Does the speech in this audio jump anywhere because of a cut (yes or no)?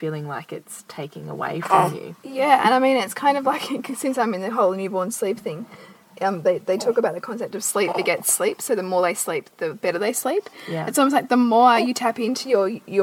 no